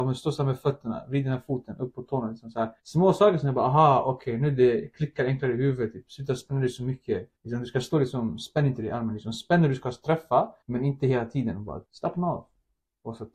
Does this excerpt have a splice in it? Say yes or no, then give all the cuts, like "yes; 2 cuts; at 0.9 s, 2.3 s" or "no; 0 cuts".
yes; 4 cuts; at 2.8 s, 7.4 s, 10.6 s, 11.8 s